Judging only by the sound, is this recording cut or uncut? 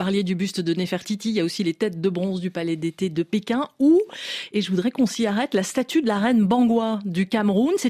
uncut